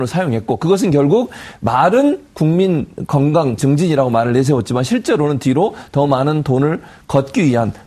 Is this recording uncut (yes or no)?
no